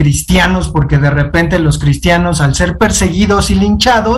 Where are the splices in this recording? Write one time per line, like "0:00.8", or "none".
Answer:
none